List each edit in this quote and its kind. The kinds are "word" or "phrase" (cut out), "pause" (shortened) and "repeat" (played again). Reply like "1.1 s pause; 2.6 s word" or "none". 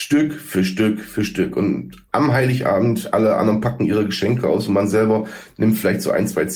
2.1 s pause